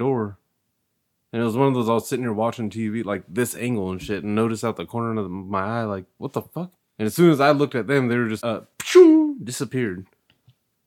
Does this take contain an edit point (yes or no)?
yes